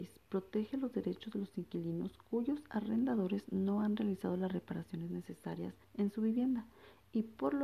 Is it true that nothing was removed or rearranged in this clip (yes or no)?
no